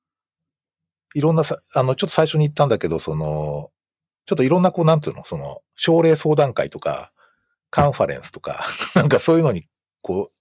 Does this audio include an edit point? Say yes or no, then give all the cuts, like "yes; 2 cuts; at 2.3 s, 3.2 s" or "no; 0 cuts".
no; 0 cuts